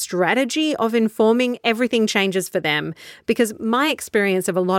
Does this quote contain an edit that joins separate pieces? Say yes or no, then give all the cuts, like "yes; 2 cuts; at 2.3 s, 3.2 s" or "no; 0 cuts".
no; 0 cuts